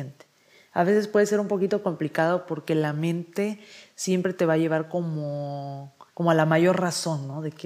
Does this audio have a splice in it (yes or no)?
yes